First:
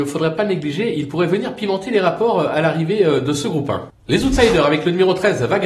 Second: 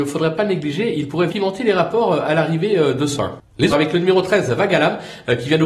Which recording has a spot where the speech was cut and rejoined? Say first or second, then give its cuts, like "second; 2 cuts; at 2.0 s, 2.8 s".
second; 3 cuts; at 1.3 s, 3.1 s, 3.7 s